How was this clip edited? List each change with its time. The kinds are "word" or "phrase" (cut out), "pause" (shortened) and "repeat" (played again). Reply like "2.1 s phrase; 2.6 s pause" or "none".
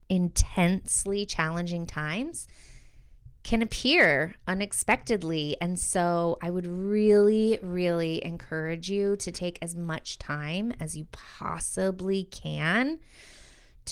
none